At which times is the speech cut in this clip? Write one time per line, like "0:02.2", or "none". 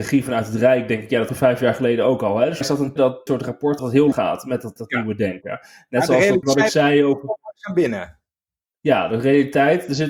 0:01.3
0:02.6
0:03.0
0:03.3
0:03.8
0:04.1
0:04.8
0:06.4